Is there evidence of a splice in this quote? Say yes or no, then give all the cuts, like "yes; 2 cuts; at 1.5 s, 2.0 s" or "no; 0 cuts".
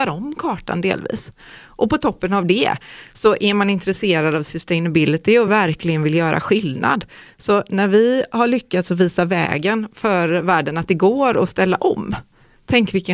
no; 0 cuts